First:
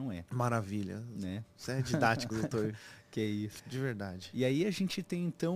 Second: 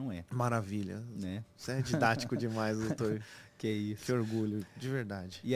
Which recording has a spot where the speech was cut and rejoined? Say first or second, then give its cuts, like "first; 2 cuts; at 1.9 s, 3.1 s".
first; 2 cuts; at 2.3 s, 3.6 s